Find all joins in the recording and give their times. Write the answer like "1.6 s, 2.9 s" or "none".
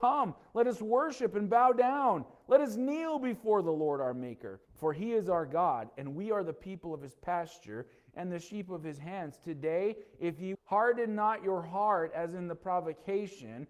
4.6 s, 10.5 s